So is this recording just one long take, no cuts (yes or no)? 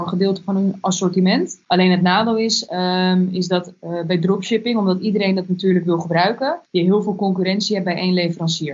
no